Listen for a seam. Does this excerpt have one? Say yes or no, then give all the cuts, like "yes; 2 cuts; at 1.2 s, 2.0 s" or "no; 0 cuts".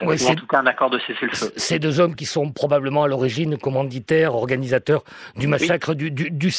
no; 0 cuts